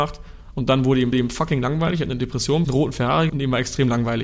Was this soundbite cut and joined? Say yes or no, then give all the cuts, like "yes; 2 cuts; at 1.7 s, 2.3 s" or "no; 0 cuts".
yes; 3 cuts; at 1.1 s, 2.6 s, 3.3 s